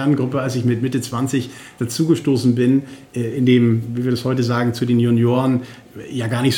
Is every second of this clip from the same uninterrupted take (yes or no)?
yes